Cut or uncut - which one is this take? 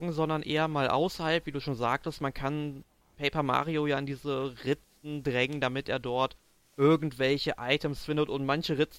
uncut